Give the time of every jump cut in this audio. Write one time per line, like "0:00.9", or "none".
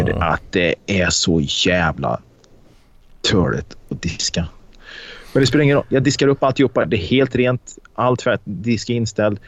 none